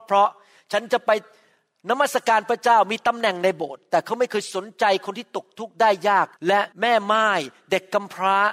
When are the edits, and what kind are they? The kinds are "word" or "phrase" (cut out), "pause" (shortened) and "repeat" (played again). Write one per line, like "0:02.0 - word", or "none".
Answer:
0:06.4 - pause
0:06.7 - pause

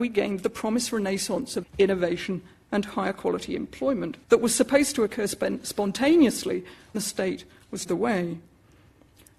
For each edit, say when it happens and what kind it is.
0:01.6 - word
0:04.2 - pause
0:06.9 - word
0:07.8 - phrase

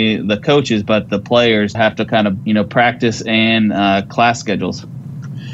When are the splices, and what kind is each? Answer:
0:01.7 - word
0:02.4 - word

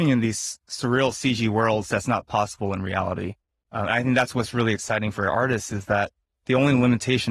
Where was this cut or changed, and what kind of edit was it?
none

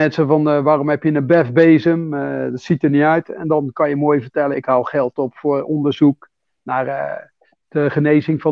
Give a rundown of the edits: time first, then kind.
0:04.5 - phrase

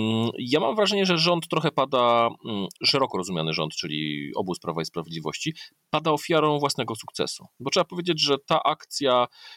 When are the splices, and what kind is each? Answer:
0:02.8 - pause

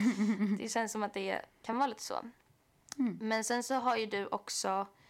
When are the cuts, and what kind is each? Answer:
none

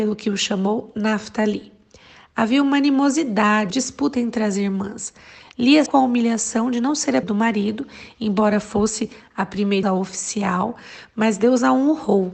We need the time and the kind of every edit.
0:03.7 - word
0:05.9 - word
0:07.2 - word
0:09.8 - word

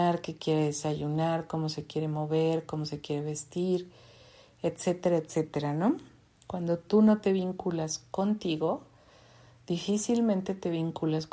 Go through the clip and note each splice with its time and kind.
none

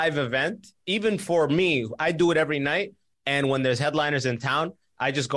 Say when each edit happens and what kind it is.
none

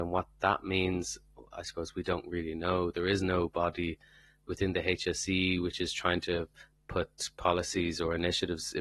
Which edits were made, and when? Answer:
none

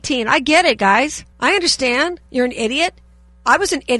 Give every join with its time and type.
0:01.3 - pause
0:02.3 - pause

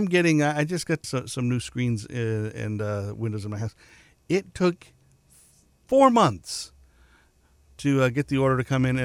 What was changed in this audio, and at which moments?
0:01.0 - word

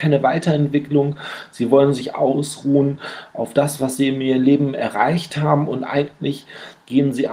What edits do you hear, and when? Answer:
none

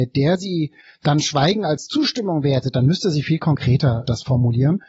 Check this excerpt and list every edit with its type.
none

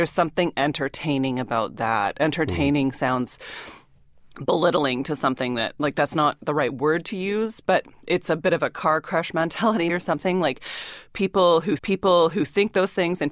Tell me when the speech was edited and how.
0:07.9 - pause
0:09.9 - word
0:11.8 - repeat

